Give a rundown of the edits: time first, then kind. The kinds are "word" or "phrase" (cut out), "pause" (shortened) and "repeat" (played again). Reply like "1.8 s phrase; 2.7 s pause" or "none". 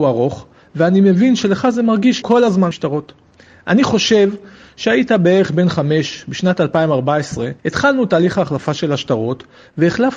2.2 s word; 2.7 s word; 7.6 s pause